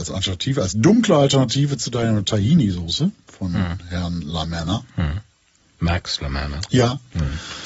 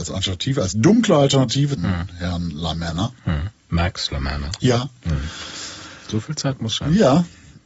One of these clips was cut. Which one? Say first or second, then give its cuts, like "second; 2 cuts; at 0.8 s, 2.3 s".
second; 2 cuts; at 1.8 s, 3.5 s